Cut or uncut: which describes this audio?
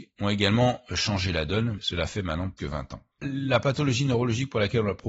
cut